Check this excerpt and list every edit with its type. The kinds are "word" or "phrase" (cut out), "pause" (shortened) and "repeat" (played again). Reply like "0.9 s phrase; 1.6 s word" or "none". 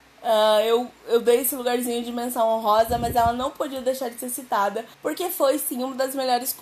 4.9 s pause